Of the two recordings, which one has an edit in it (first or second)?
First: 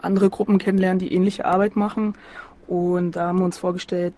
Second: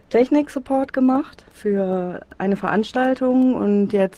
second